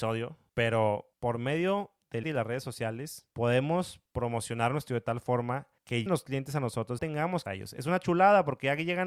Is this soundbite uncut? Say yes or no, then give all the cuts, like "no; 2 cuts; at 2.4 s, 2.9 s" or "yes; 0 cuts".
no; 6 cuts; at 2.2 s, 4.1 s, 4.9 s, 6.1 s, 7.0 s, 7.5 s